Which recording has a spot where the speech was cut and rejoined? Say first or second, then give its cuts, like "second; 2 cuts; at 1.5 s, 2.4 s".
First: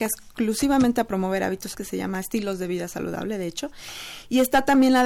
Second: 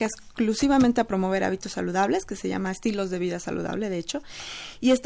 first; 1 cut; at 1.7 s